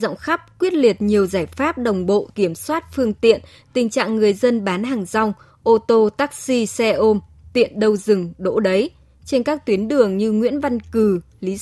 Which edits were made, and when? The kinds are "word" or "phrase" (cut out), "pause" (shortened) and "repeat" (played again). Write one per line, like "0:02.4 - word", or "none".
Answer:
0:02.3 - phrase